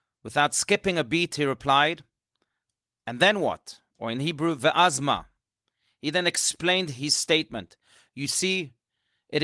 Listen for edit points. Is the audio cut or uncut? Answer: uncut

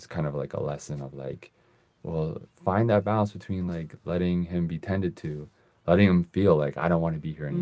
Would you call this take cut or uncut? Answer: uncut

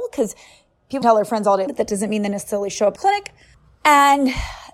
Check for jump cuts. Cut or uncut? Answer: cut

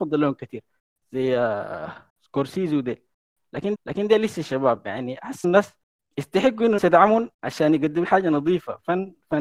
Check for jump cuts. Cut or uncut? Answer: cut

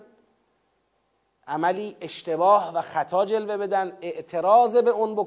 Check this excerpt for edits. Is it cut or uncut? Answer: uncut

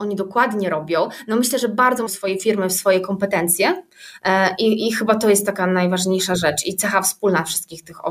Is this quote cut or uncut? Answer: cut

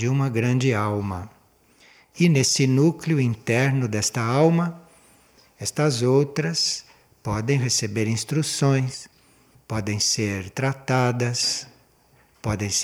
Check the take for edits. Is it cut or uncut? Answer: uncut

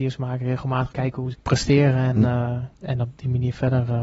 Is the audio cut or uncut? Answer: cut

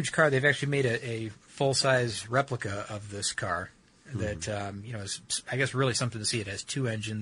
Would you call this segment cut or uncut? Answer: uncut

